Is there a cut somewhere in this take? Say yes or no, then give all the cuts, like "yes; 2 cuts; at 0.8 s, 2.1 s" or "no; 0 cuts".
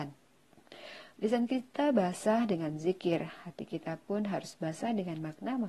no; 0 cuts